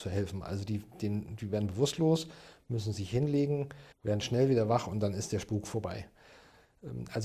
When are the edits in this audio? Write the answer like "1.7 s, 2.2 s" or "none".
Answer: 3.9 s